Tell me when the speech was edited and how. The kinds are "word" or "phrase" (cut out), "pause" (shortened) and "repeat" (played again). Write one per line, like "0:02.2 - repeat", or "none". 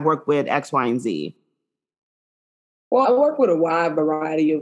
0:03.0 - word